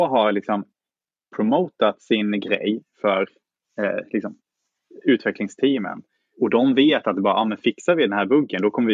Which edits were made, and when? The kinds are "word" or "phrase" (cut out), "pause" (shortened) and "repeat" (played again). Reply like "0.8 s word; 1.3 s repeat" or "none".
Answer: 6.3 s word